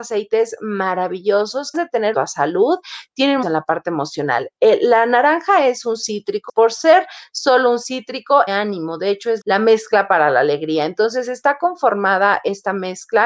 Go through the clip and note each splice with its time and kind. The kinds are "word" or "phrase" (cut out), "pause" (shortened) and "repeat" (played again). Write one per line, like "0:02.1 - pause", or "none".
0:01.7 - word
0:02.1 - phrase
0:03.4 - phrase
0:06.5 - word
0:08.5 - phrase
0:09.4 - word